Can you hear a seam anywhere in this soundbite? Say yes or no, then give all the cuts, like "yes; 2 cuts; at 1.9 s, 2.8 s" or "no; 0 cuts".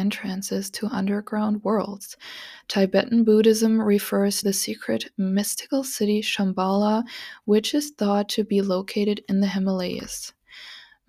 yes; 1 cut; at 4.4 s